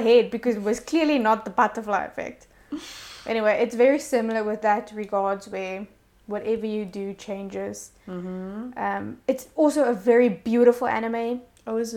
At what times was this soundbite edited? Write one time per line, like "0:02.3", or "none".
0:06.1